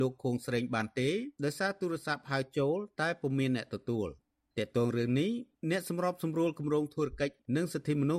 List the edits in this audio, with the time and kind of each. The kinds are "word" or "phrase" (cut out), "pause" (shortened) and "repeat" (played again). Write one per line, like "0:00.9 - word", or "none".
none